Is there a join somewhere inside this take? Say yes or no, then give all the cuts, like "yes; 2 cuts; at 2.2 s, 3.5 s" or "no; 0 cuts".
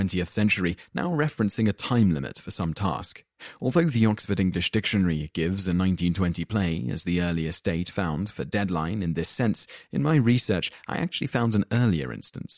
no; 0 cuts